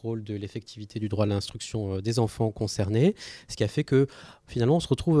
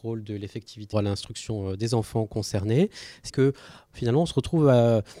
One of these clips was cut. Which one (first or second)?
second